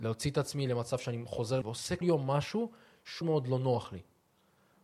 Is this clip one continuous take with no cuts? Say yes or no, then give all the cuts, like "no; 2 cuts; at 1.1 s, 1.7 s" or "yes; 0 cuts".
no; 3 cuts; at 1.6 s, 2.0 s, 3.2 s